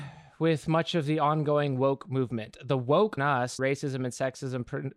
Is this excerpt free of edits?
no; 2 cuts; at 3.2 s, 3.6 s

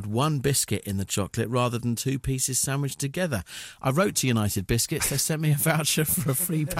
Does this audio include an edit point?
no; 0 cuts

